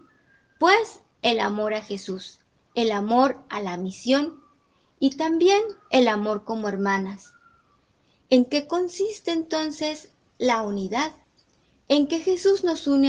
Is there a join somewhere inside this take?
no; 0 cuts

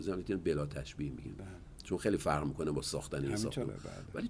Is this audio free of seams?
yes; 0 cuts

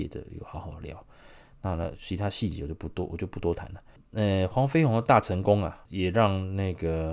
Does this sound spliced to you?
no; 0 cuts

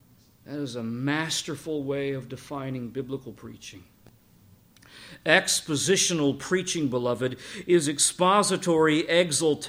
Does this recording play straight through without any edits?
yes; 0 cuts

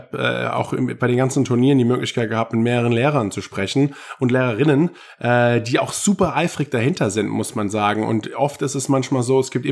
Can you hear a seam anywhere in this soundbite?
no; 0 cuts

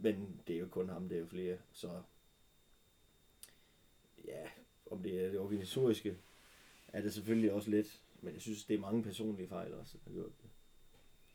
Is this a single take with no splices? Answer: no; 1 cut; at 1.6 s

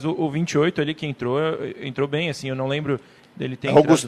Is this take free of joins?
yes; 0 cuts

